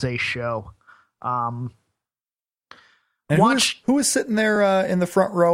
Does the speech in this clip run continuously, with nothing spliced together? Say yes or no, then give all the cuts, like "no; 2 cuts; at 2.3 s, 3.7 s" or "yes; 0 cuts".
yes; 0 cuts